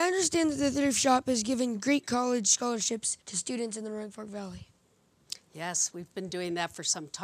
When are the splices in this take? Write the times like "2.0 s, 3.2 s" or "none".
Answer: 3.2 s